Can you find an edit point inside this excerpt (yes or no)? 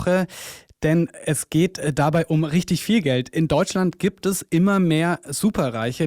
no